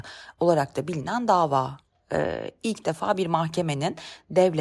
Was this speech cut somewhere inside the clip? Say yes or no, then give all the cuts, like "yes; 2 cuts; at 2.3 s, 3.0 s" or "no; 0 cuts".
no; 0 cuts